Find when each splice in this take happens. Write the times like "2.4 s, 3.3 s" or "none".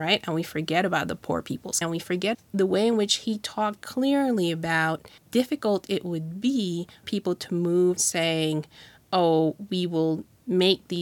1.8 s, 2.3 s, 3.8 s, 5.2 s, 7.0 s, 8.0 s

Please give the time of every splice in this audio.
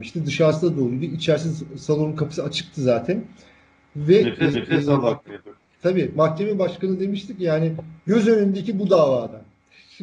4.5 s, 8.0 s

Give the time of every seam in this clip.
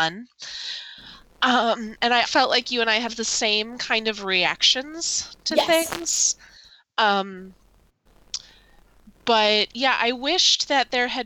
2.2 s, 3.1 s

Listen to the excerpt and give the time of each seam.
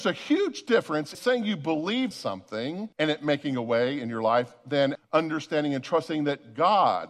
1.1 s, 2.1 s, 2.9 s, 4.9 s

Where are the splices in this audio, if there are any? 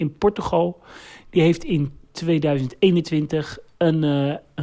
none

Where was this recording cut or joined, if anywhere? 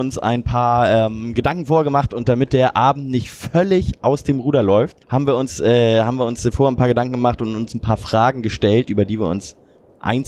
5.0 s

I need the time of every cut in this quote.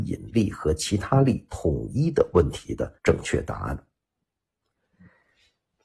3.0 s

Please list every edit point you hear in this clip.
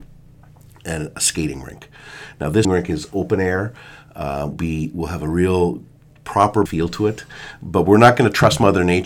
1.1 s, 2.6 s, 4.5 s, 6.7 s

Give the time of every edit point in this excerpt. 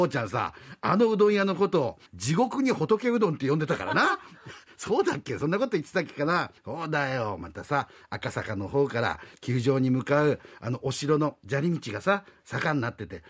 2.1 s, 6.6 s

